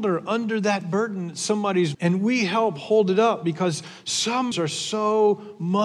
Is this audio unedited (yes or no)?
no